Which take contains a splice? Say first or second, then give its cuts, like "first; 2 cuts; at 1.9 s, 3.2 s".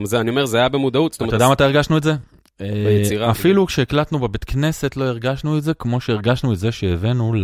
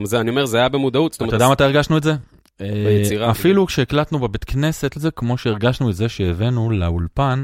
second; 1 cut; at 5.0 s